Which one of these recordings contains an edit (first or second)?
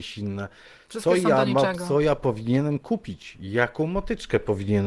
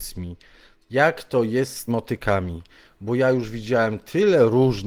second